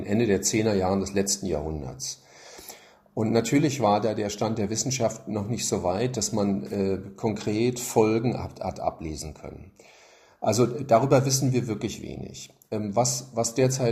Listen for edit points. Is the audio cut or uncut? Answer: uncut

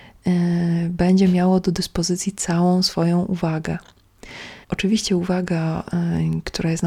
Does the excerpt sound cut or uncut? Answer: cut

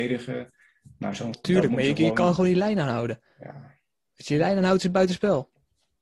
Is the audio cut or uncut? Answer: cut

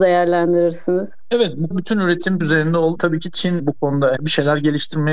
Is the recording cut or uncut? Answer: cut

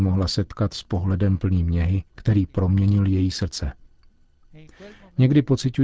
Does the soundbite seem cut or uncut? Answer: cut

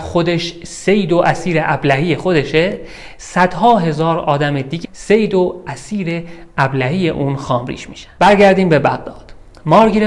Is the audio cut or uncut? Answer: cut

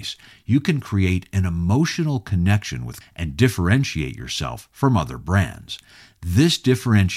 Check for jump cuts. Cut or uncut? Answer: cut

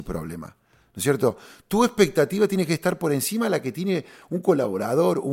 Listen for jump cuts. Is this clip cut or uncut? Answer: uncut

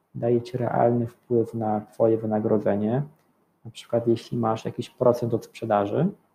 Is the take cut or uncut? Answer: uncut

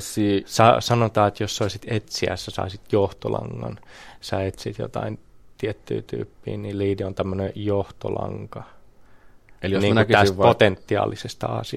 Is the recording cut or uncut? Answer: uncut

